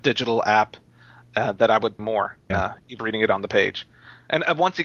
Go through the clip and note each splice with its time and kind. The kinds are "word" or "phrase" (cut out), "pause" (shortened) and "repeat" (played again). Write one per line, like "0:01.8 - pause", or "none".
0:02.0 - word
0:02.5 - word
0:03.0 - word